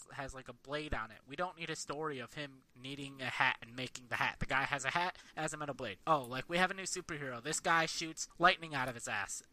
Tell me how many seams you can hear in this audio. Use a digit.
3